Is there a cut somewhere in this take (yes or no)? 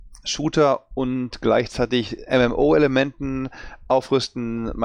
no